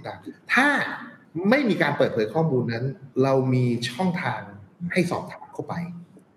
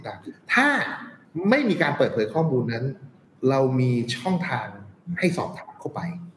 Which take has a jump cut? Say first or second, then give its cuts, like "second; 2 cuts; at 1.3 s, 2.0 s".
first; 1 cut; at 3.1 s